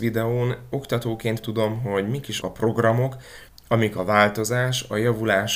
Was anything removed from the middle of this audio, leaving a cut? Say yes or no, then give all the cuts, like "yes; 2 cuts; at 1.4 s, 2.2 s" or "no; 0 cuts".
yes; 3 cuts; at 1.4 s, 2.4 s, 3.5 s